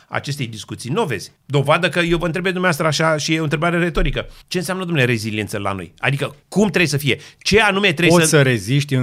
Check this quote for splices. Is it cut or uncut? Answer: cut